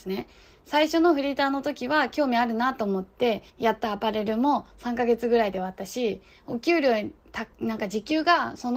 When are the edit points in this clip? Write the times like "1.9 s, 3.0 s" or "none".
3.5 s, 7.5 s